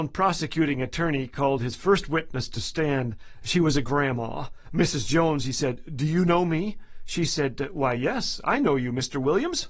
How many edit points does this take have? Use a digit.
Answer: 0